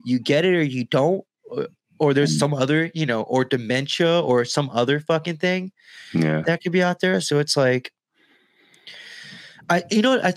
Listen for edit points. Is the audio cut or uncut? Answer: uncut